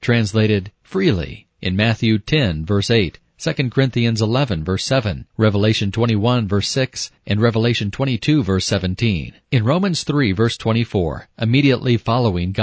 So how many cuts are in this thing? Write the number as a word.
five